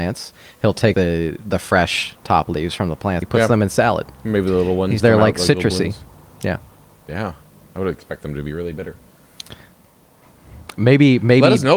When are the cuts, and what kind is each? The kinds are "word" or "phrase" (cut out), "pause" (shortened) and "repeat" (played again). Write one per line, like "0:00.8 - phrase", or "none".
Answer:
0:00.9 - word
0:03.2 - word
0:05.0 - word